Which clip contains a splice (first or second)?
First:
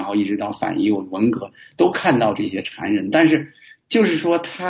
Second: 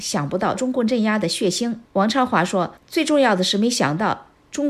second